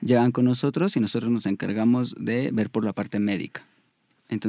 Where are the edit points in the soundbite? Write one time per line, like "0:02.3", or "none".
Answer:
none

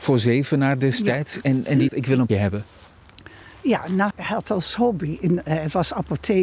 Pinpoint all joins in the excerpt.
0:01.9
0:02.3
0:04.1

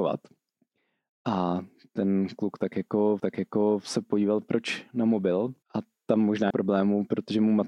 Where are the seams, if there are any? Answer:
0:03.2
0:05.6
0:06.5

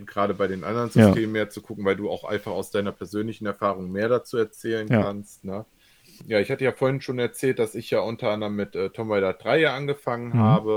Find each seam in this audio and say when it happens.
none

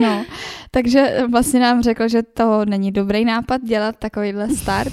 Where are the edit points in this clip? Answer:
none

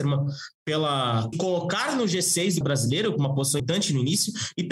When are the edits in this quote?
0:01.3
0:02.6
0:03.6

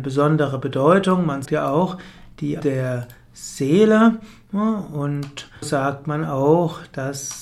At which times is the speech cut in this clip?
0:01.4
0:02.6
0:05.6

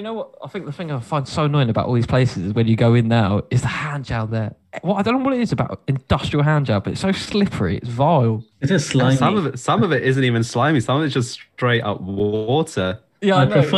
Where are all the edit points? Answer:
0:08.5

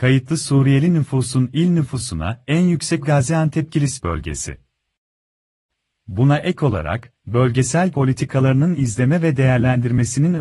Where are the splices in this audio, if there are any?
0:03.0
0:07.9

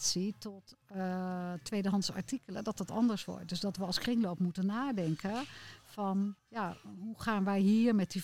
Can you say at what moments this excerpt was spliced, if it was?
0:06.4

